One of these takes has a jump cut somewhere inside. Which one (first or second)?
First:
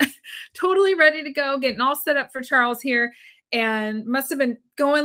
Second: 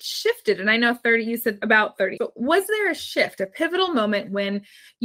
second